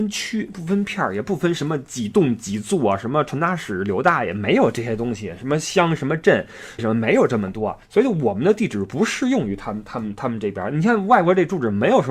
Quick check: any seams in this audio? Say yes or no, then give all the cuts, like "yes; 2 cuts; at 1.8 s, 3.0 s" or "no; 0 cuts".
yes; 2 cuts; at 6.8 s, 7.8 s